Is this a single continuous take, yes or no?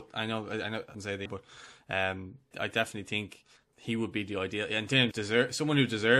no